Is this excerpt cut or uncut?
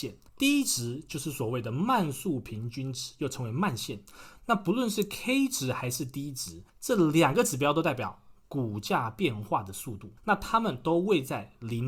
cut